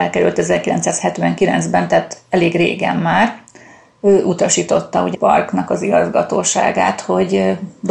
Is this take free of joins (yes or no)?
no